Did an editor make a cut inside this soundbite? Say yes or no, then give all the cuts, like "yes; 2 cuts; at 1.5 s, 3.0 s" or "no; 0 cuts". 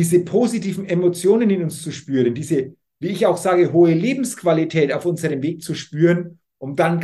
no; 0 cuts